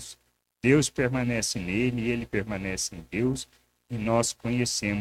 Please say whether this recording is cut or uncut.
uncut